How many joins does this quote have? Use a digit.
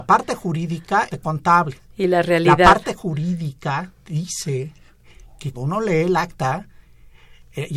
2